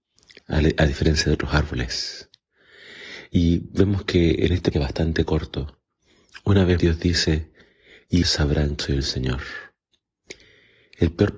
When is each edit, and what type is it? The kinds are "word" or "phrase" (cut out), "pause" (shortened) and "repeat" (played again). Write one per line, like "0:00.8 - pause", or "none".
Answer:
0:04.7 - word
0:06.8 - word
0:08.2 - word
0:08.8 - word